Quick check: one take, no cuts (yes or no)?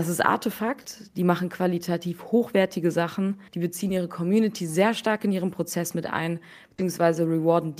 no